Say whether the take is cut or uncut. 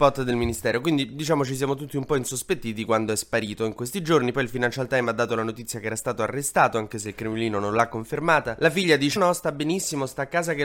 cut